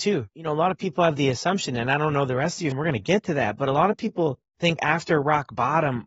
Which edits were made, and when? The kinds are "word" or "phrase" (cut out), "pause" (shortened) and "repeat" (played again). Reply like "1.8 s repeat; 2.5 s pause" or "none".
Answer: 2.7 s word; 4.8 s word